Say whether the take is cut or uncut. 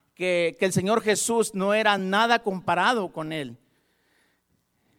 uncut